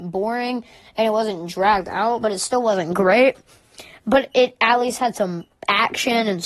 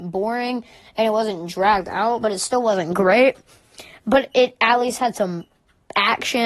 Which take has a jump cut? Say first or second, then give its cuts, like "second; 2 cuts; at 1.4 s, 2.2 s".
first; 1 cut; at 5.5 s